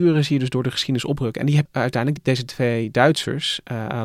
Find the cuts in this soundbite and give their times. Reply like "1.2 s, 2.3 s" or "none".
1.7 s, 2.2 s